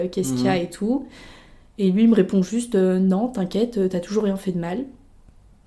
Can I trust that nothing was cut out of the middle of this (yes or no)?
yes